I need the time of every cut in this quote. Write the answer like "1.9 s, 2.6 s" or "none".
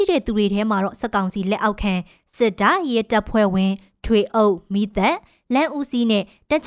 none